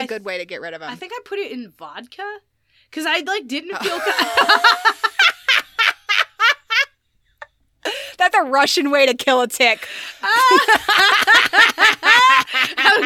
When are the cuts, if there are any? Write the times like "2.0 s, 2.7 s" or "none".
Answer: 8.3 s

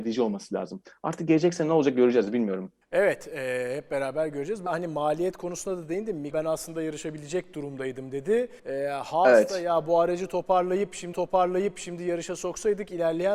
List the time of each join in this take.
2.8 s, 4.7 s, 6.3 s, 8.6 s, 11.1 s

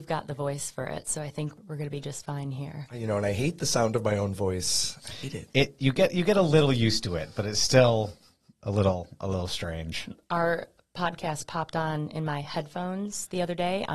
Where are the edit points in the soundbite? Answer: none

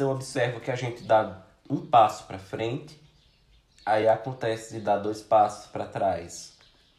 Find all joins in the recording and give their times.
none

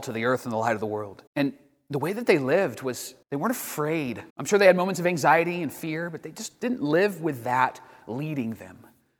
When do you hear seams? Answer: 1.3 s, 3.2 s, 4.3 s

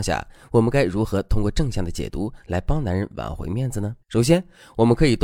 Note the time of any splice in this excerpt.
4.0 s

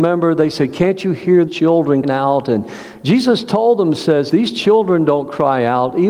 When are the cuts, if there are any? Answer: 1.5 s, 2.0 s, 4.3 s

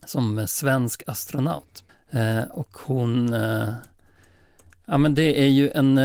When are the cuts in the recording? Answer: 1.9 s

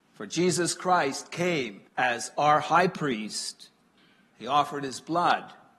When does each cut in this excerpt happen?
1.9 s, 4.0 s

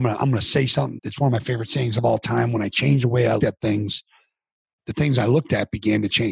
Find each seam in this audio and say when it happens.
1.0 s, 3.4 s

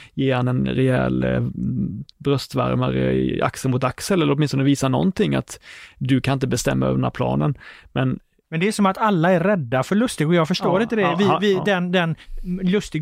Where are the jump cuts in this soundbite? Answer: 2.1 s

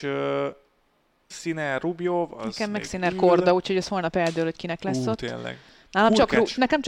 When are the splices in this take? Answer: none

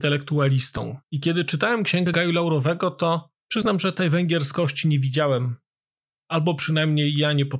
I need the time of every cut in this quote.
1.0 s

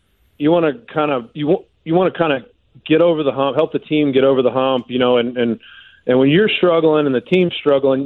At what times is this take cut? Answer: none

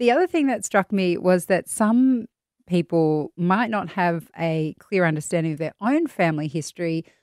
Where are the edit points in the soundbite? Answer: none

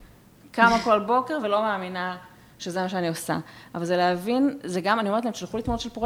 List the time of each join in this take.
none

